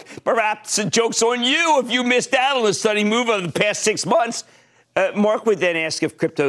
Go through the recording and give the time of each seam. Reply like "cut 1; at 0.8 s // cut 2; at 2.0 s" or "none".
none